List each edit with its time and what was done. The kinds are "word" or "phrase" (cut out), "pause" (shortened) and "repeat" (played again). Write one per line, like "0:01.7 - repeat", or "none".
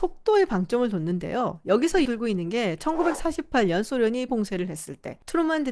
0:02.1 - word
0:04.3 - word